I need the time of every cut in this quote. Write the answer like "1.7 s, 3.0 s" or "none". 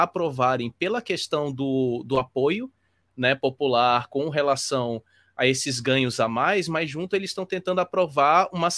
none

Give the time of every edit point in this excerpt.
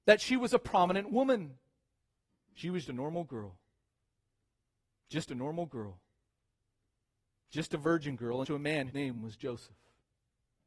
2.0 s, 2.8 s, 5.3 s, 8.4 s, 8.9 s

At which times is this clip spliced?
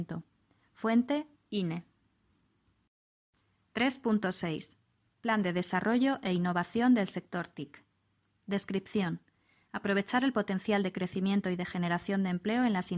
none

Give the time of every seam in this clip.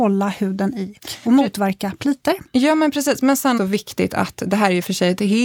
1.0 s, 3.6 s

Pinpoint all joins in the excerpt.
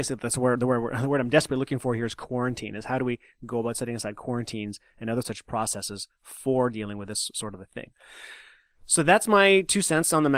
none

